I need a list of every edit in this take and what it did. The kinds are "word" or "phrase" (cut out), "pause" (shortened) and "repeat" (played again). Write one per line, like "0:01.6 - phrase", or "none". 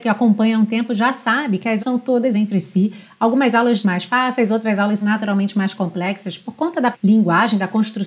0:01.8 - word
0:02.3 - word
0:03.8 - phrase
0:05.0 - word
0:06.9 - word